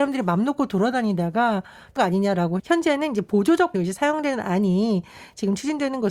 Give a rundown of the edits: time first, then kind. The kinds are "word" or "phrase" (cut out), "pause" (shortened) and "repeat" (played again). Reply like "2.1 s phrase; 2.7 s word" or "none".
2.0 s word; 2.6 s word; 3.7 s word